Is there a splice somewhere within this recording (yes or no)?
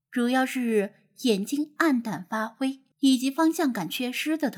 yes